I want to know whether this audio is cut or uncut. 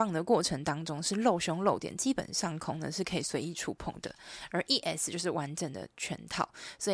uncut